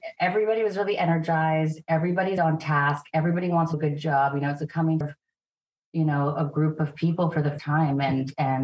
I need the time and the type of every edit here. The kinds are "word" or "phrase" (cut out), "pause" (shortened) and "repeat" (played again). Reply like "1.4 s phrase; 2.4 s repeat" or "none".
2.4 s word; 3.7 s word; 5.0 s word; 7.6 s word